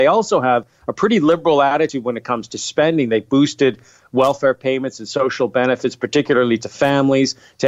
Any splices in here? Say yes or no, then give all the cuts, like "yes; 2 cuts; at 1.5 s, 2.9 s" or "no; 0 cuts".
no; 0 cuts